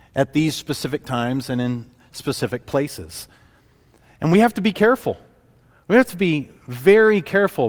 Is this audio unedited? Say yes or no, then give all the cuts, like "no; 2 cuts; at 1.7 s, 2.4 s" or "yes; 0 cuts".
yes; 0 cuts